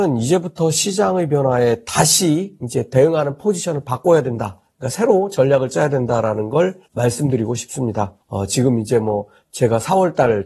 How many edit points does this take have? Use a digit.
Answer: 2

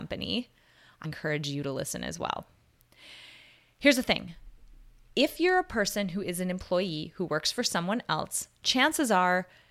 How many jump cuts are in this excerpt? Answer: 1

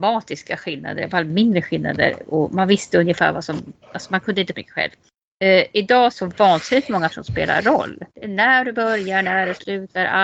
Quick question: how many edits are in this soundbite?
5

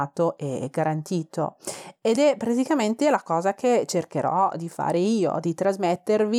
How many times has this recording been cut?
0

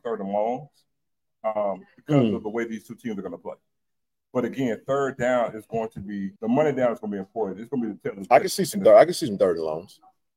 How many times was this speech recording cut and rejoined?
1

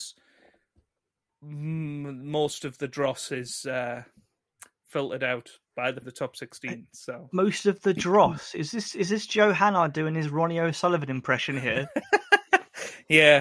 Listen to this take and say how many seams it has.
1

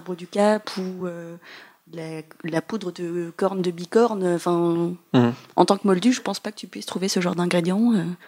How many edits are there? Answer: 0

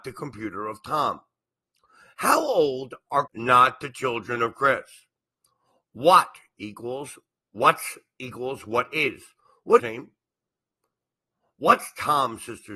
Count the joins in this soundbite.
2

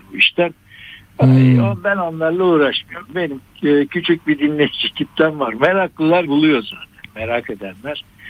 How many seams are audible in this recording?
1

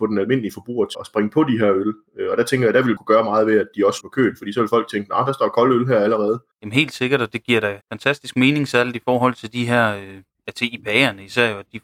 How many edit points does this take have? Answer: 5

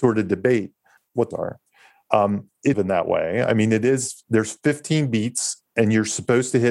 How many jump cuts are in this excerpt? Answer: 3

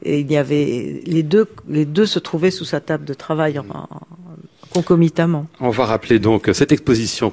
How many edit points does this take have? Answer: 0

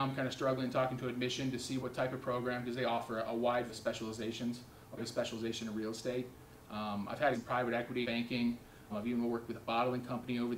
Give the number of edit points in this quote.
6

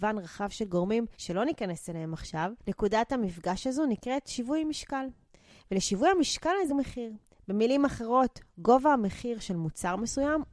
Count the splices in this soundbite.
3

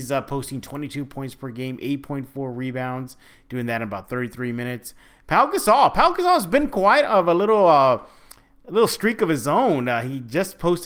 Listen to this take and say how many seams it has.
0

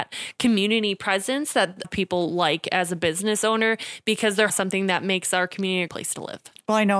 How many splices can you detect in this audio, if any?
3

